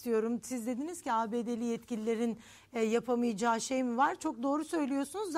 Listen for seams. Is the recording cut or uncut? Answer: uncut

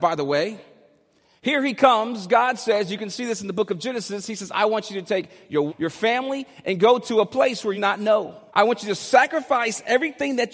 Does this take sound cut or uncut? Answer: cut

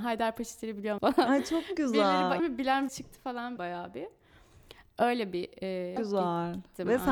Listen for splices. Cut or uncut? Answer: cut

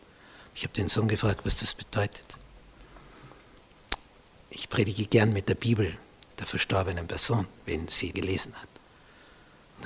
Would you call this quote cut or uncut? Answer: cut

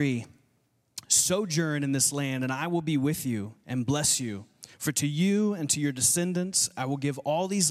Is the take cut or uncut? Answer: cut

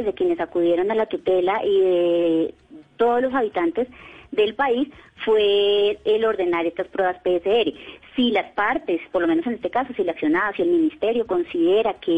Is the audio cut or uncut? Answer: uncut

